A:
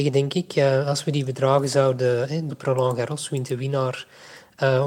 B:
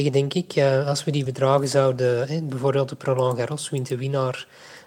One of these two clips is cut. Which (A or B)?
A